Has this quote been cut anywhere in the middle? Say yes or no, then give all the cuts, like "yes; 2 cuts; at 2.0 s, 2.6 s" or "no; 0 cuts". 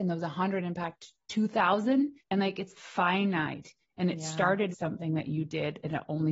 yes; 3 cuts; at 2.2 s, 2.8 s, 4.7 s